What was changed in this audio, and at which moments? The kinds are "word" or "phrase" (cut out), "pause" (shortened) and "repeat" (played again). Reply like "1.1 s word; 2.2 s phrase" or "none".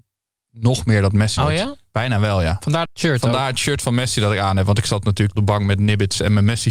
1.4 s word; 2.8 s word; 5.4 s phrase